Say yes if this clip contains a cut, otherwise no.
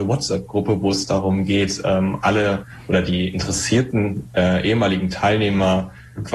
no